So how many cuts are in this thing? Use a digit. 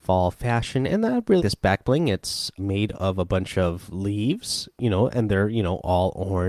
2